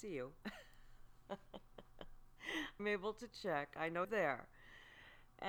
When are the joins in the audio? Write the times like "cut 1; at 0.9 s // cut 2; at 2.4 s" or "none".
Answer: cut 1; at 2.8 s // cut 2; at 4.0 s